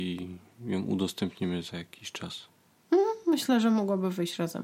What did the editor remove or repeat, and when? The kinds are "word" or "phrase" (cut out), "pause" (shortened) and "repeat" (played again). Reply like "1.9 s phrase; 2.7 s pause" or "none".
none

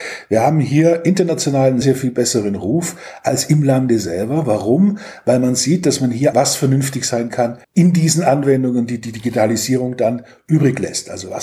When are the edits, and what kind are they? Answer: 1.8 s word; 6.3 s phrase; 7.6 s pause

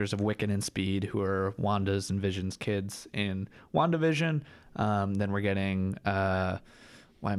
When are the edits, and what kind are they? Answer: none

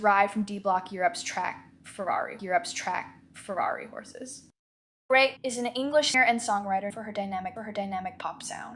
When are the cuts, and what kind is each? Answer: 2.4 s repeat; 5.4 s phrase; 6.1 s word; 6.9 s word; 7.6 s repeat

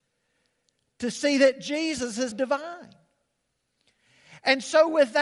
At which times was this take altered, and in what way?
2.3 s word

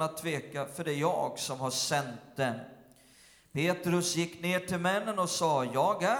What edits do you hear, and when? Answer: none

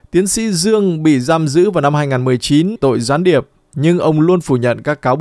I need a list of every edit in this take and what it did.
2.8 s word

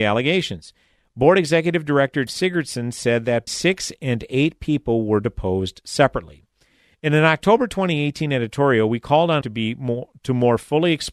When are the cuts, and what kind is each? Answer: 2.3 s word; 3.5 s word; 9.4 s word

